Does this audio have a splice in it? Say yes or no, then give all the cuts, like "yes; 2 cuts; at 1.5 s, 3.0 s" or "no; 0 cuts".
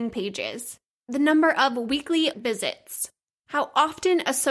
yes; 1 cut; at 2.3 s